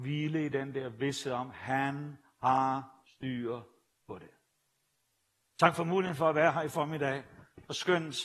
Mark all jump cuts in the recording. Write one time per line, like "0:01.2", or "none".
none